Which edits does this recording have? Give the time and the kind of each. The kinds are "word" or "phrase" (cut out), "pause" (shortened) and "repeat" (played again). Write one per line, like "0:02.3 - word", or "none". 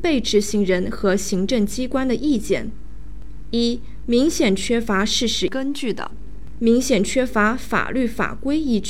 0:06.6 - word